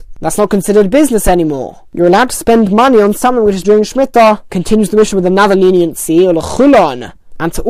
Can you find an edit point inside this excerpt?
yes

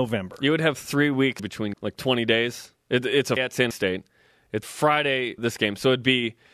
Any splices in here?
yes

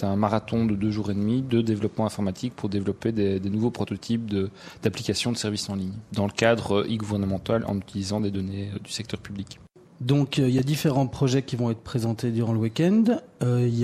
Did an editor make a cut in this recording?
no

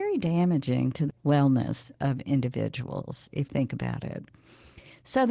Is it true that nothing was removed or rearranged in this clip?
no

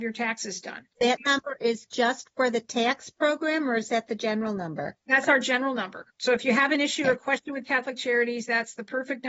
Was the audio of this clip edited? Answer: yes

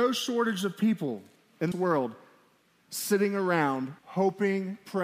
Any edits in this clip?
yes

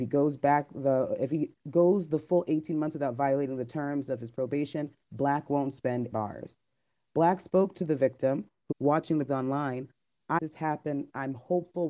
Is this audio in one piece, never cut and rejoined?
no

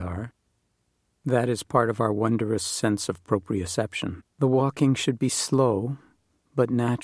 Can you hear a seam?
yes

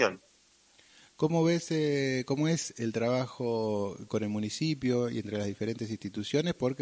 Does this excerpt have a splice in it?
no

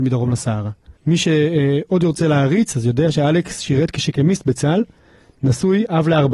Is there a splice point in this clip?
yes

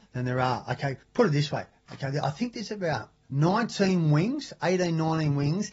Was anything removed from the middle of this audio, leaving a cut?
yes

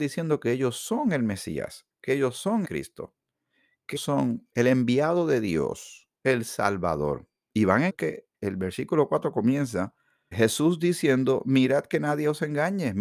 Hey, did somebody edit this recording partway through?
yes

